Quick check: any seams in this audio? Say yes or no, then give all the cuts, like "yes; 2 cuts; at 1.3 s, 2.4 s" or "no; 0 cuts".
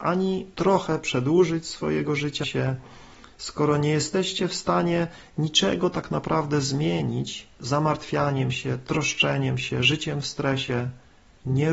yes; 1 cut; at 2.4 s